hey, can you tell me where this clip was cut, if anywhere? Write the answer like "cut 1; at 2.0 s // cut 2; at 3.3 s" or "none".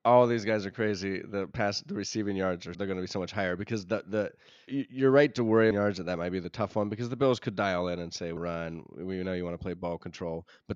cut 1; at 2.7 s // cut 2; at 4.7 s // cut 3; at 5.7 s // cut 4; at 8.4 s